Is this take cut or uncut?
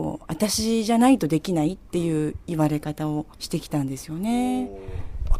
cut